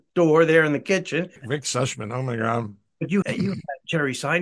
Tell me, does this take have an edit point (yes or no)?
yes